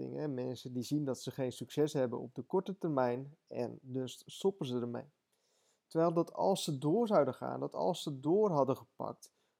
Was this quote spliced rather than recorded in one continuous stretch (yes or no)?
no